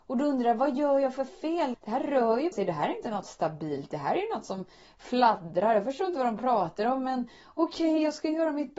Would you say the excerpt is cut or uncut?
cut